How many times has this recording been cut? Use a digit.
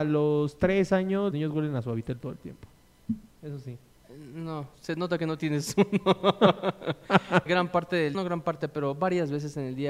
3